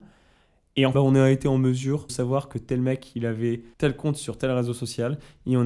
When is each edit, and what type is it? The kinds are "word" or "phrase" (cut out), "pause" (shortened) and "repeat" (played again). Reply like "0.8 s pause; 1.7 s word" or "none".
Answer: 0.9 s phrase; 2.1 s word; 3.7 s pause